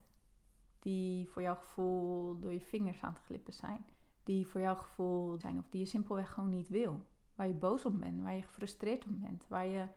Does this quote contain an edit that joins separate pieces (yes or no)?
yes